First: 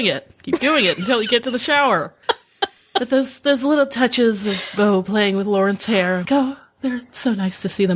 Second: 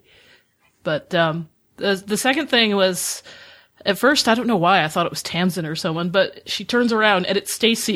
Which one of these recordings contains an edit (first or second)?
first